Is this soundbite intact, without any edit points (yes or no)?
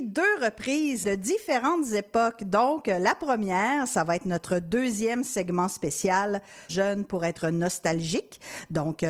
no